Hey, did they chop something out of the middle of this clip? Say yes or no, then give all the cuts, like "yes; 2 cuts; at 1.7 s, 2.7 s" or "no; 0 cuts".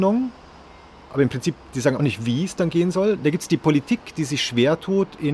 yes; 1 cut; at 2.0 s